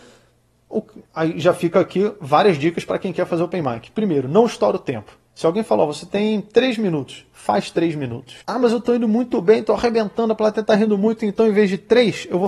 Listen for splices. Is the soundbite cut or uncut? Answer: cut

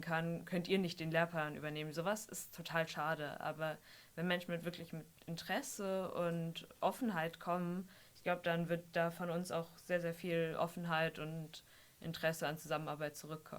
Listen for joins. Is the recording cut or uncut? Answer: uncut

